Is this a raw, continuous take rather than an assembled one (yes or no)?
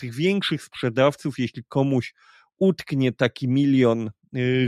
yes